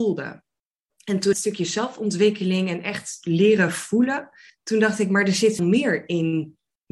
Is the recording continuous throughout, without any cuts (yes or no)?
no